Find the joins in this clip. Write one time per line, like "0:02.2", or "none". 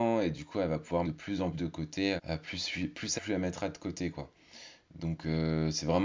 0:01.0
0:01.5
0:02.2
0:03.2